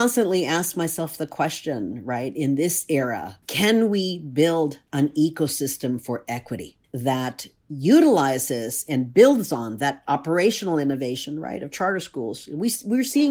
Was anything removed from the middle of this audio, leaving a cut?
yes; 2 cuts; at 3.4 s, 6.8 s

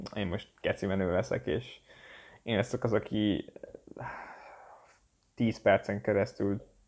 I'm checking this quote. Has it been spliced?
no; 0 cuts

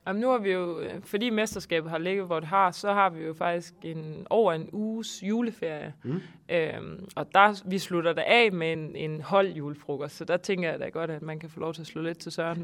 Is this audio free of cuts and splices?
yes; 0 cuts

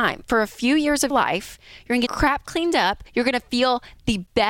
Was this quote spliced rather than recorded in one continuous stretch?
yes; 3 cuts; at 1.1 s, 2.1 s, 3.1 s

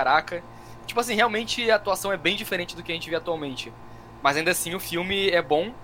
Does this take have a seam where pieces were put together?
no; 0 cuts

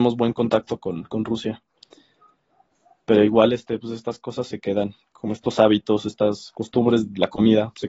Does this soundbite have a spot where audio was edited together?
no; 0 cuts

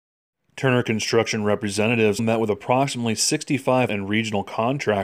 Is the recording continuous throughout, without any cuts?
no; 2 cuts; at 2.2 s, 3.9 s

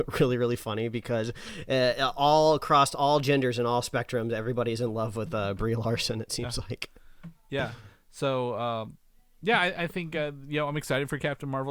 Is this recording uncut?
yes; 0 cuts

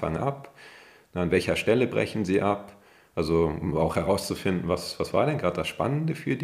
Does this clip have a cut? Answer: no; 0 cuts

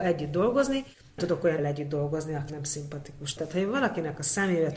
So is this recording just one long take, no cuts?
no; 3 cuts; at 1.2 s, 1.6 s, 2.5 s

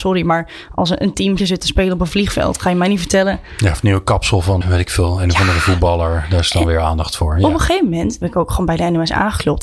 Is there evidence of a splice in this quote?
yes; 3 cuts; at 1.4 s, 4.6 s, 8.2 s

